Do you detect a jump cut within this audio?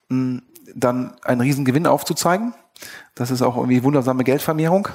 no; 0 cuts

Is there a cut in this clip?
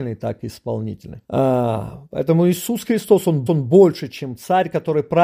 yes; 2 cuts; at 1.2 s, 3.5 s

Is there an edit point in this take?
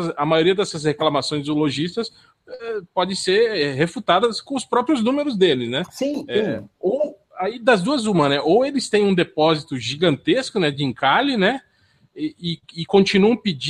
no; 0 cuts

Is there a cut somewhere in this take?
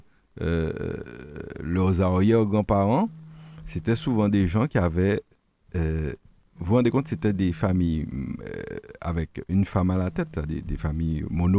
no; 0 cuts

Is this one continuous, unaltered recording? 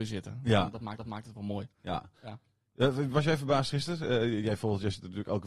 no; 1 cut; at 1.0 s

